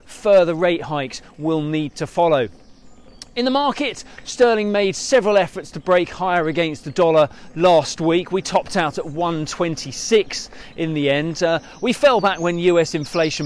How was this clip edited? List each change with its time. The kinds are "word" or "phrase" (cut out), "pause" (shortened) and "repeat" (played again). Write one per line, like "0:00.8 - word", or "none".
none